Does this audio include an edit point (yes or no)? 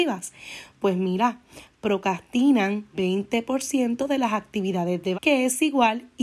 yes